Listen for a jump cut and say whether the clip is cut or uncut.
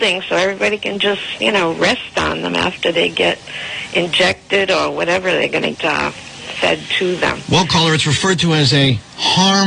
cut